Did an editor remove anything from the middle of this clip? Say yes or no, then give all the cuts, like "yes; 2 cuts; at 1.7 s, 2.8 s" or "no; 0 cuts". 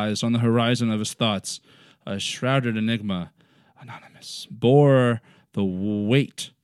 no; 0 cuts